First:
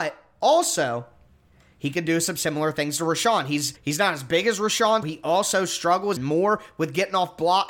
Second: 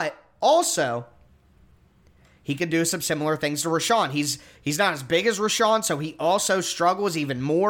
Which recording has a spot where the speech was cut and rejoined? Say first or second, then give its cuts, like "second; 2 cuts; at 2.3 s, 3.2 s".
first; 4 cuts; at 1.5 s, 3.8 s, 5.0 s, 6.2 s